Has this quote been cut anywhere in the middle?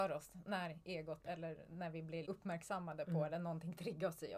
yes; 1 cut; at 2.3 s

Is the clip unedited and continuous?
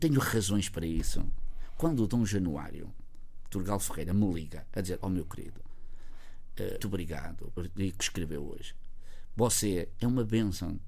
no; 2 cuts; at 6.8 s, 7.6 s

